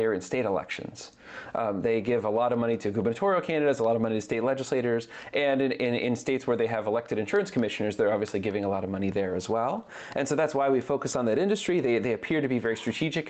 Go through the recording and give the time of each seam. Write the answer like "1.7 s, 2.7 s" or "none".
none